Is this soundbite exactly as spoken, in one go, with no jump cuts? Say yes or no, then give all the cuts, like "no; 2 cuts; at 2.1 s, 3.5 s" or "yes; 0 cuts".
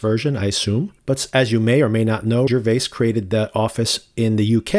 no; 2 cuts; at 1.0 s, 2.5 s